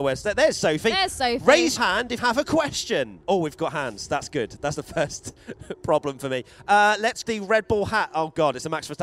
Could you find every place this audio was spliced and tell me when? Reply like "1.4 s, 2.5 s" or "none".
1.8 s, 2.2 s, 3.2 s, 4.7 s, 7.2 s